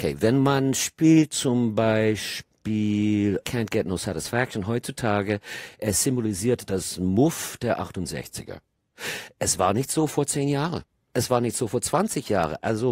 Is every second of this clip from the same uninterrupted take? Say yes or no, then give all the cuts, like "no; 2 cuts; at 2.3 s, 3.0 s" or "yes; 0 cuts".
yes; 0 cuts